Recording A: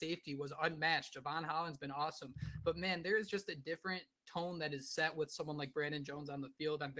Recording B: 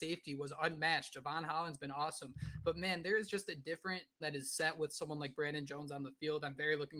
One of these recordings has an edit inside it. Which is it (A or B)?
B